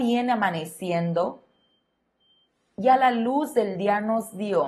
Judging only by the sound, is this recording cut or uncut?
uncut